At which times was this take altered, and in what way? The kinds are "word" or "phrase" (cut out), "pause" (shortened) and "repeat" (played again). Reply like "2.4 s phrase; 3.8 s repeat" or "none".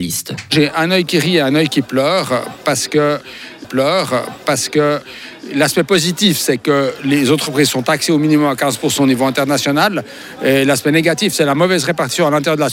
3.6 s repeat